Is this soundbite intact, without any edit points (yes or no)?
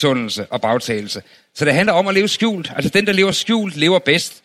yes